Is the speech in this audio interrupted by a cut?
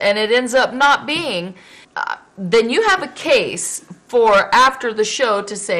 yes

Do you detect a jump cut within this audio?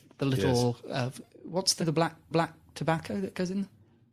yes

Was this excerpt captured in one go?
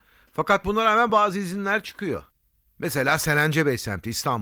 yes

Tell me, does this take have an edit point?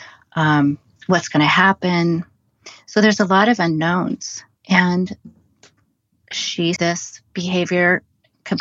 yes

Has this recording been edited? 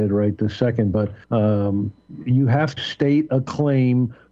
yes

